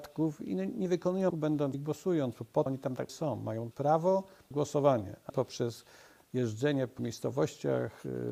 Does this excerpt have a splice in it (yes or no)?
yes